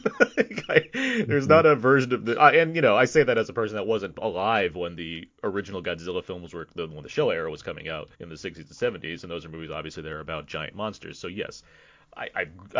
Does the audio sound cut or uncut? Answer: cut